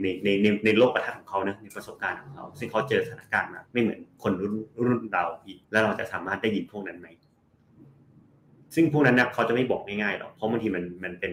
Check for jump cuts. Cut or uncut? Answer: cut